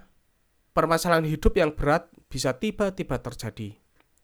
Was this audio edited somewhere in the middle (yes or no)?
no